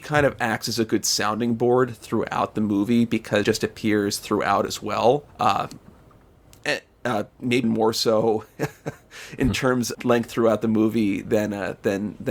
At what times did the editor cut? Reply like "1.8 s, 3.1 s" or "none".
3.4 s, 5.3 s, 7.6 s, 9.9 s